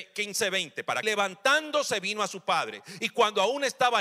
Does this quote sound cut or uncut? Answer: cut